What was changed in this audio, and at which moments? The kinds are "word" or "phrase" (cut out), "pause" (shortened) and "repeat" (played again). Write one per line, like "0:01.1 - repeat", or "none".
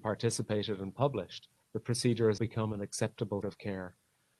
0:01.6 - pause
0:02.4 - word
0:03.4 - word